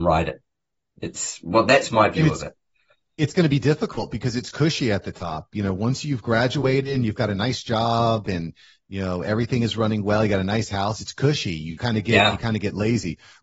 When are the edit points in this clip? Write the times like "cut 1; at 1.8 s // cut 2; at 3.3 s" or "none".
none